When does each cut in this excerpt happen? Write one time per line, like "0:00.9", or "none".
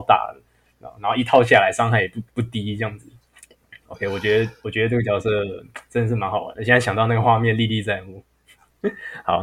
0:02.3

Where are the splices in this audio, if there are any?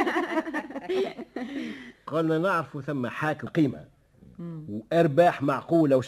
0:01.9
0:03.5

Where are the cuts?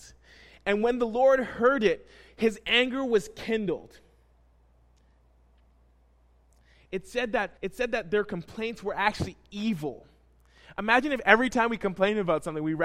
0:07.6

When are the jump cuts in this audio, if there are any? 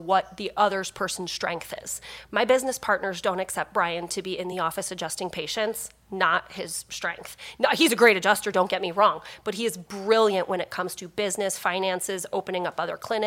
none

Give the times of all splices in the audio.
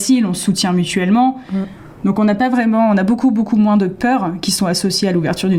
none

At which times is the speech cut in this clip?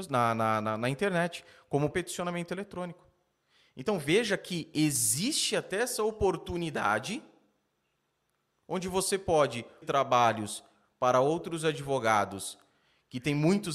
0:01.9
0:09.8

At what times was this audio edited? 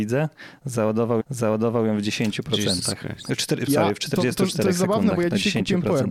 0:01.2
0:03.7

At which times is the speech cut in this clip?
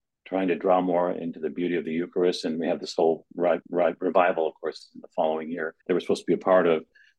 0:03.6
0:05.8

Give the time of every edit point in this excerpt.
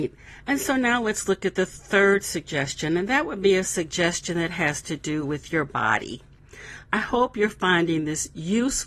none

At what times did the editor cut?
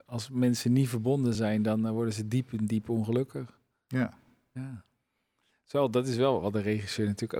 none

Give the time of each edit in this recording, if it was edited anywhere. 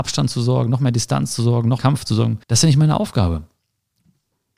0:01.8
0:02.4

